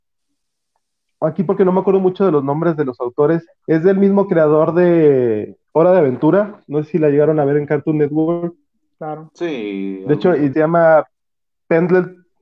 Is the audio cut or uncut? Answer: cut